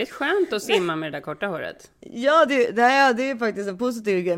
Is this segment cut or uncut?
uncut